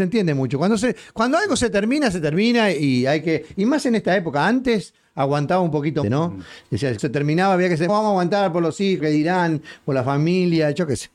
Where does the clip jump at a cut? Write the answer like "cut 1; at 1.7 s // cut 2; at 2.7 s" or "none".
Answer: cut 1; at 6.0 s // cut 2; at 7.0 s // cut 3; at 7.9 s // cut 4; at 9.0 s